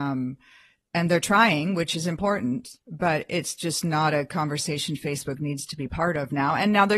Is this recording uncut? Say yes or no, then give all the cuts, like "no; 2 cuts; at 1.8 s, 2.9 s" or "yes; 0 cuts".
no; 1 cut; at 2.8 s